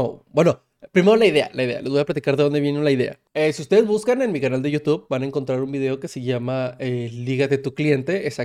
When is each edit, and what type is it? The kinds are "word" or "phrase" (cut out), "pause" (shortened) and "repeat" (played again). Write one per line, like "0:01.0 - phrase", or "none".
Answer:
0:03.3 - pause